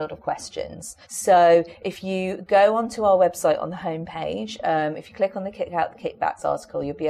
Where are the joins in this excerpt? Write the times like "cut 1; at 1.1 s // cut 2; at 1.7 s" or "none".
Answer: cut 1; at 1.0 s